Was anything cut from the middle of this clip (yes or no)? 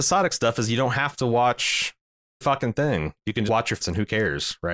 yes